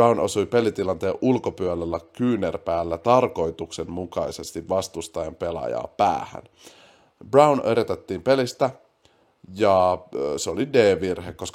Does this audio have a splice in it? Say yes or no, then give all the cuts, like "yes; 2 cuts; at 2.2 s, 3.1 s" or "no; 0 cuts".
no; 0 cuts